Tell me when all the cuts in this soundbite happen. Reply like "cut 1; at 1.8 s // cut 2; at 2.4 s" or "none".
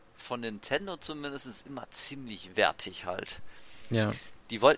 none